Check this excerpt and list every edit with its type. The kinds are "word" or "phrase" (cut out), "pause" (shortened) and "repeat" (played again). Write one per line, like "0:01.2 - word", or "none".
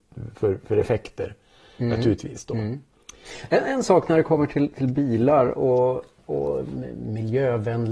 none